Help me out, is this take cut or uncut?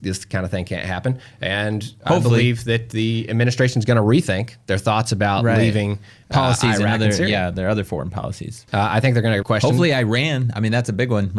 cut